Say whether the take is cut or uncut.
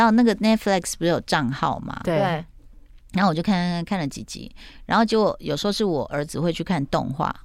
uncut